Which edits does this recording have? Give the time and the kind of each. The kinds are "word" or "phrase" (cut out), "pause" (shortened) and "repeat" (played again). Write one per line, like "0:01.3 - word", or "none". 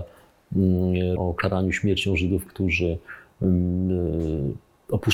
0:01.2 - word
0:02.5 - word